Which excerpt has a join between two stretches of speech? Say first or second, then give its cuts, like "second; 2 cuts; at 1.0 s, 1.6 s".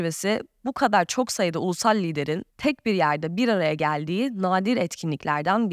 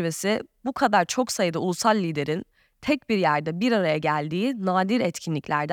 first; 1 cut; at 2.5 s